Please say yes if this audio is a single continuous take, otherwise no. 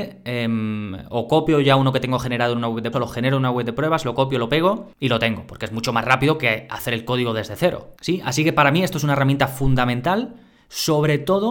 no